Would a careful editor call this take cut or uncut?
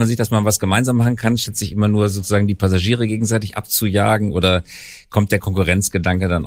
uncut